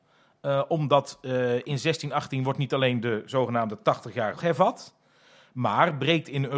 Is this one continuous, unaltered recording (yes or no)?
no